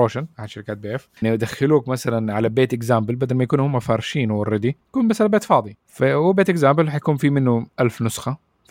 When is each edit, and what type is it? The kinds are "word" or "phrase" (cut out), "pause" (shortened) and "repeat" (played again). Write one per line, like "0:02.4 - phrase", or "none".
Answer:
0:01.2 - word
0:04.8 - pause
0:07.7 - pause